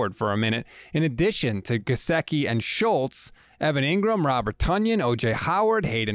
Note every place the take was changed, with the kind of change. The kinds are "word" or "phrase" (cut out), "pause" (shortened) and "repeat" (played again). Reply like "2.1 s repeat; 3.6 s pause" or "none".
none